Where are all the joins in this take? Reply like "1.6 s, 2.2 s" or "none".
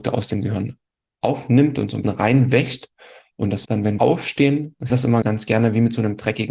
2.0 s, 3.7 s, 4.0 s, 4.9 s, 5.2 s

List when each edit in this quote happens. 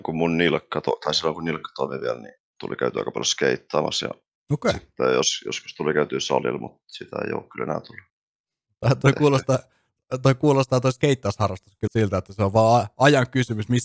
2.4 s, 9.0 s, 11.9 s

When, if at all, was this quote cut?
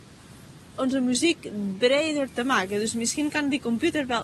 none

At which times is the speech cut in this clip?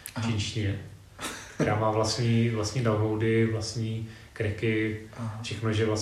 none

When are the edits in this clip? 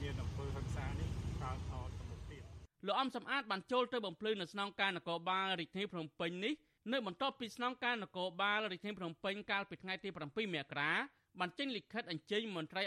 2.7 s

